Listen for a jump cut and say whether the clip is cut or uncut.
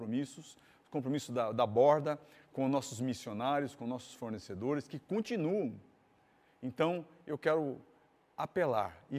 uncut